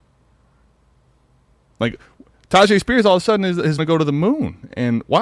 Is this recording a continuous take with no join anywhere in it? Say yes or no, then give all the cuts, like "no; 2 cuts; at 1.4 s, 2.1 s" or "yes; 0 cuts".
no; 1 cut; at 3.8 s